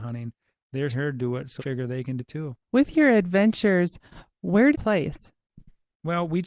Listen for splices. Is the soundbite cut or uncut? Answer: cut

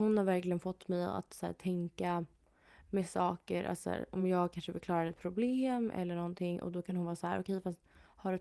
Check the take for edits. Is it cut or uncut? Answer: uncut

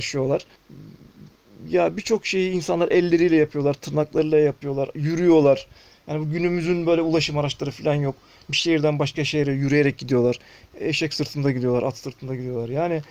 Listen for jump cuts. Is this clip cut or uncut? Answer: uncut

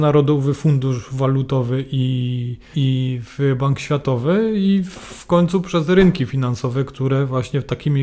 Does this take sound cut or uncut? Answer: cut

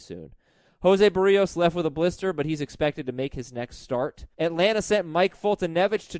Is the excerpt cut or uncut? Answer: cut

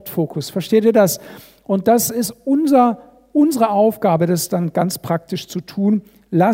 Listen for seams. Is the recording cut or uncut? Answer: uncut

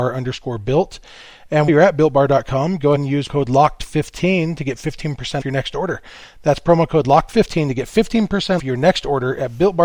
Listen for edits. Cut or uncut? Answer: cut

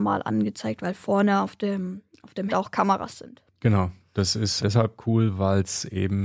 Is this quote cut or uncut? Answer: cut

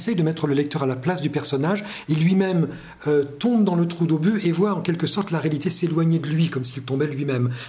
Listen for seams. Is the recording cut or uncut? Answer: uncut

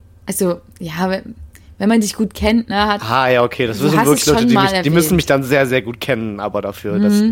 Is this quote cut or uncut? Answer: uncut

